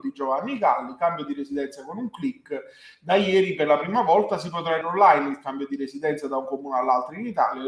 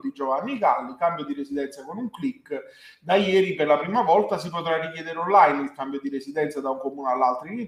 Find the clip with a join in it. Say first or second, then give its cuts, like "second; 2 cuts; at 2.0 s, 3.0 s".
first; 1 cut; at 4.8 s